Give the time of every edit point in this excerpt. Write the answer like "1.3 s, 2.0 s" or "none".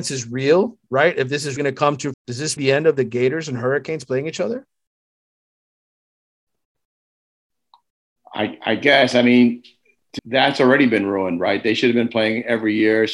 1.6 s, 2.1 s, 2.6 s, 10.2 s